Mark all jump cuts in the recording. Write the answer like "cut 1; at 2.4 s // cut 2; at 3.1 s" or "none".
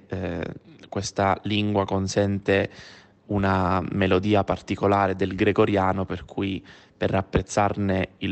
none